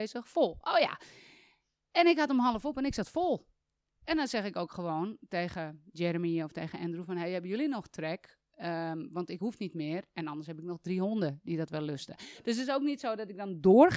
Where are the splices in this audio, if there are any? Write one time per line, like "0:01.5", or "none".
none